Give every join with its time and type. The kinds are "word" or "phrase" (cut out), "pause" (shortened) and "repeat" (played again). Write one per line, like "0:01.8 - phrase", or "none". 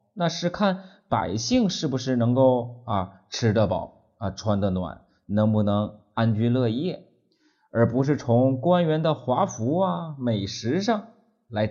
none